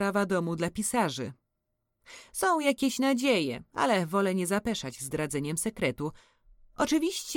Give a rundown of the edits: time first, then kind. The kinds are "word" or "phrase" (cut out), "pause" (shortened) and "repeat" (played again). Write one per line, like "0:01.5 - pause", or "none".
none